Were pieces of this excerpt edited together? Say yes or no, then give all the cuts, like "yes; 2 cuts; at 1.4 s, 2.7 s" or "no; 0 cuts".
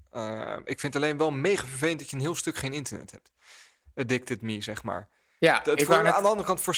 no; 0 cuts